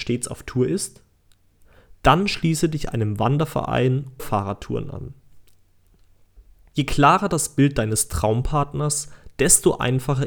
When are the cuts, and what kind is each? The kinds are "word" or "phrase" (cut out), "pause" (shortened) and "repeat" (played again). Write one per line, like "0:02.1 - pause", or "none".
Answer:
0:04.2 - word